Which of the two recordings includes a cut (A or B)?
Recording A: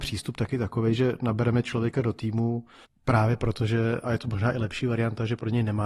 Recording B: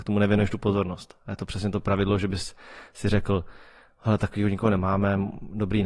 A